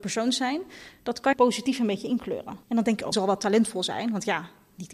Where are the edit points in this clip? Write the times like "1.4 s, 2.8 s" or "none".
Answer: 1.3 s, 2.6 s, 3.1 s